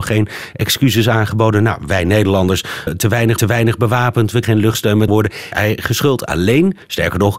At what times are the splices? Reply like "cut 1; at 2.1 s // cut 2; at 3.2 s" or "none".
cut 1; at 2.9 s // cut 2; at 3.4 s // cut 3; at 4.4 s // cut 4; at 5.1 s // cut 5; at 5.5 s